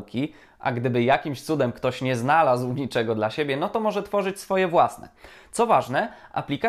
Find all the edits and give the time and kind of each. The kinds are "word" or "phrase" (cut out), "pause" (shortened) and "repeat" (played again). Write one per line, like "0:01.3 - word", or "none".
none